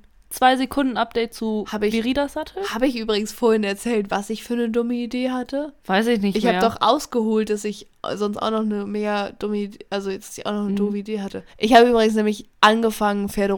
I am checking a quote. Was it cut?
yes; 3 cuts; at 5.8 s, 11.5 s, 12.5 s

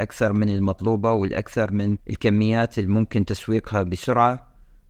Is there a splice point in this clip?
yes; 1 cut; at 2.0 s

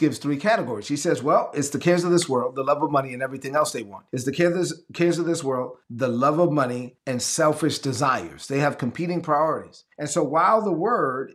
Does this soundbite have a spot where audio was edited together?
yes; 4 cuts; at 4.1 s, 5.8 s, 7.0 s, 9.9 s

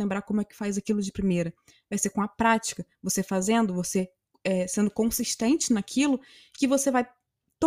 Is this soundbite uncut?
yes; 0 cuts

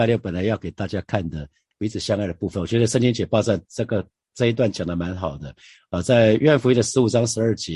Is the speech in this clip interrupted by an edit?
no; 0 cuts

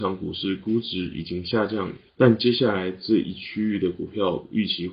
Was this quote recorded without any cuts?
no; 1 cut; at 2.1 s

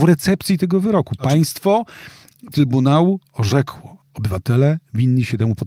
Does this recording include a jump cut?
yes; 2 cuts; at 2.5 s, 4.0 s

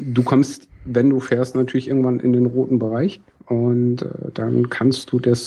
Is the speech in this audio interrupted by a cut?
yes; 1 cut; at 3.3 s

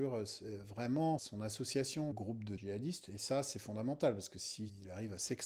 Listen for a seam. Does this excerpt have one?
yes; 3 cuts; at 1.2 s, 2.1 s, 2.6 s

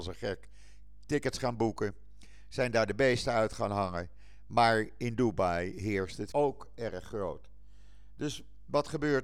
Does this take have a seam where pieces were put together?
yes; 1 cut; at 6.3 s

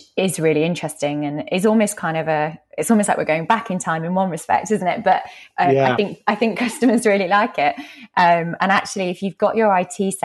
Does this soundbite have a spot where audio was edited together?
no; 0 cuts

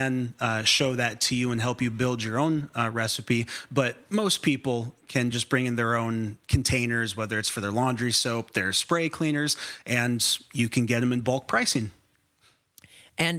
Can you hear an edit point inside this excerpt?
no; 0 cuts

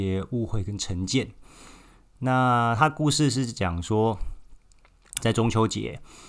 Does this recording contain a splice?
yes; 1 cut; at 5.2 s

